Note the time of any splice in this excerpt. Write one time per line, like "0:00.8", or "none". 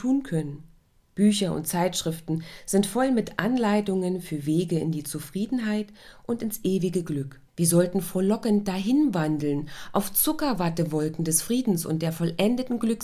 0:07.5